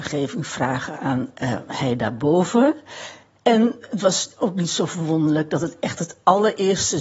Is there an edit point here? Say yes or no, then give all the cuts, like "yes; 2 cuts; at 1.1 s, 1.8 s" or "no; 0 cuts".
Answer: no; 0 cuts